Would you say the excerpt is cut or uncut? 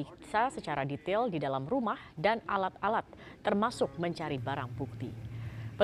uncut